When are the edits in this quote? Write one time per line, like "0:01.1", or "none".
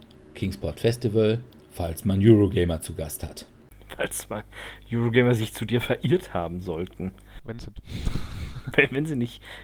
0:01.5
0:07.6